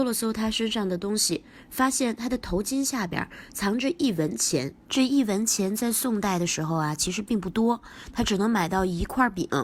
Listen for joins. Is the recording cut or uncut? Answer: cut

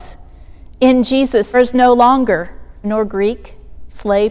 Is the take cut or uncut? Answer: cut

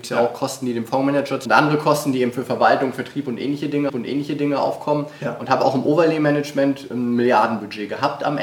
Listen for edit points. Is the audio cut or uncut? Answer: cut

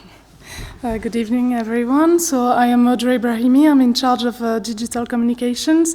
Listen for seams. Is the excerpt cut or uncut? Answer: uncut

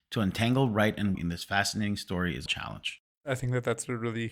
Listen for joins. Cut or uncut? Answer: cut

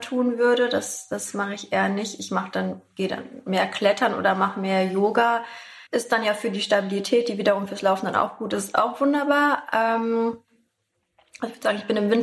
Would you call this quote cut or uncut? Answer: cut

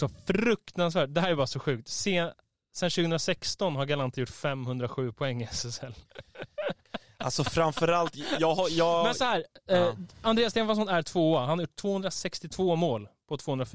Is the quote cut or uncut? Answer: uncut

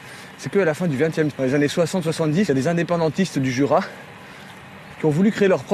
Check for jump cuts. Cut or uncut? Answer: cut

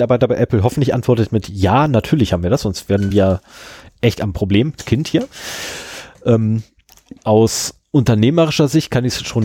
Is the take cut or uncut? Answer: uncut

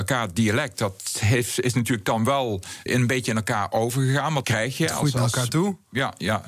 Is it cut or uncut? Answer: cut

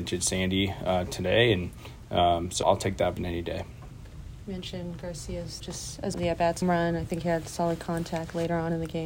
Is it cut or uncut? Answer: cut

